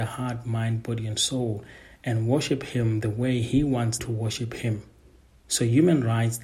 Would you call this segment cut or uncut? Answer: cut